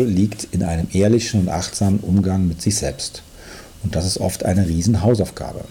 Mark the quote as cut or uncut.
uncut